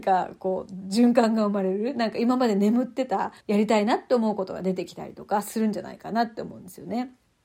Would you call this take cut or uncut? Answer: cut